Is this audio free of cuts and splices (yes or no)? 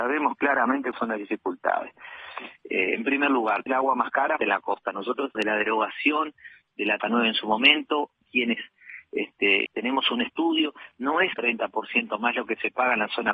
no